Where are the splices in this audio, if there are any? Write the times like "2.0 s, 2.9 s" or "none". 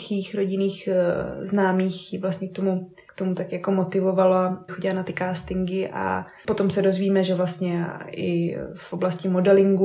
4.7 s